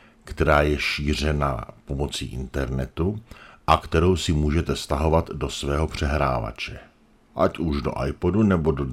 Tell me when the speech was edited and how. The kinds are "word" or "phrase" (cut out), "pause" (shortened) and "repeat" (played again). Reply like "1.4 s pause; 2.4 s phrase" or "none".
none